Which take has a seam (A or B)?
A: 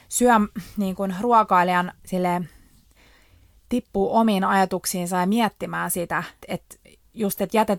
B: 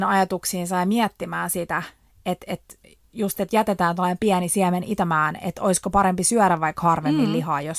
A